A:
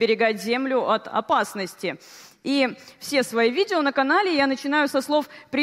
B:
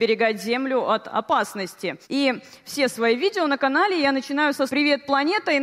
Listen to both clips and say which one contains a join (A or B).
B